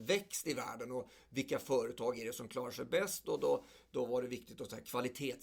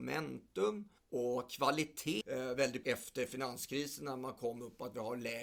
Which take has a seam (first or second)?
second